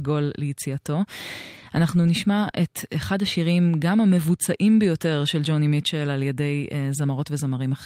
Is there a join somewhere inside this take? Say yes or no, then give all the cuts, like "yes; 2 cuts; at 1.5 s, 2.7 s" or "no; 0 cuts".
no; 0 cuts